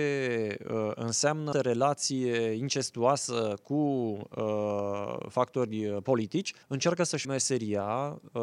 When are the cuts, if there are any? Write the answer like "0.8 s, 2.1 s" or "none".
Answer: 1.5 s, 6.6 s, 7.2 s